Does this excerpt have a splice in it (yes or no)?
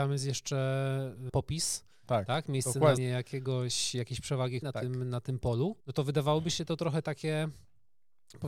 yes